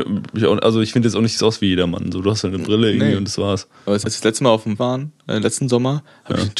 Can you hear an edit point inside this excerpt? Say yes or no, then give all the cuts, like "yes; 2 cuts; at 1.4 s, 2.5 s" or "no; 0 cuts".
yes; 3 cuts; at 1.4 s, 4.0 s, 4.8 s